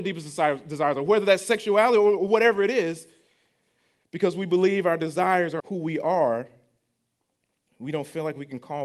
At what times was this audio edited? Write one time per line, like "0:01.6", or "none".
0:05.6